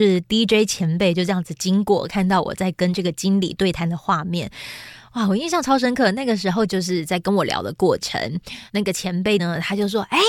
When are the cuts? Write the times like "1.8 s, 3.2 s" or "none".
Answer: 6.7 s, 8.7 s, 9.4 s